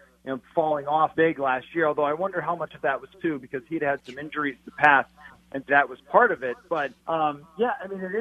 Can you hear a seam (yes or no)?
yes